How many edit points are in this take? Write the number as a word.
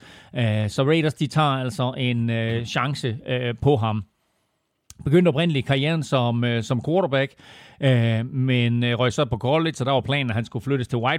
zero